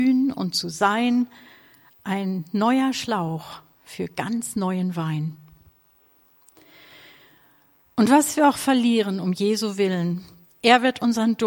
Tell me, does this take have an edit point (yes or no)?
no